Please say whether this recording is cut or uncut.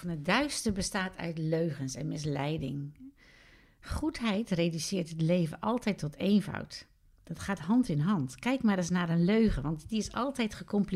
uncut